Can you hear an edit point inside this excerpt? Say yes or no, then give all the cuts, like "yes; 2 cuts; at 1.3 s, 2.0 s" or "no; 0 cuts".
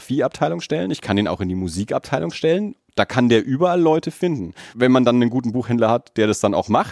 yes; 1 cut; at 4.7 s